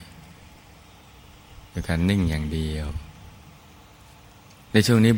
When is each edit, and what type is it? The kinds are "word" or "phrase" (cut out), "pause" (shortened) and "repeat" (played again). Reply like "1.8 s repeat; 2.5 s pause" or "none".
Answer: none

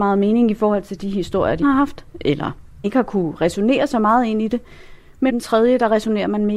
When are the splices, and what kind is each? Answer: 1.6 s word; 2.8 s word; 5.3 s word

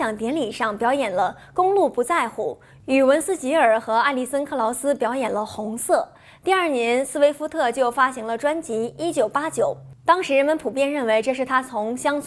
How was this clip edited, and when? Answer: none

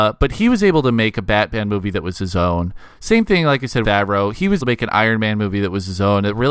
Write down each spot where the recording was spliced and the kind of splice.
3.8 s word; 4.6 s word

